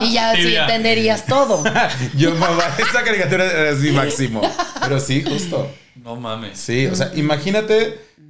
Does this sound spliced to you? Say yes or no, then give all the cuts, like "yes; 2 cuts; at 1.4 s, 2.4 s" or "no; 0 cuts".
no; 0 cuts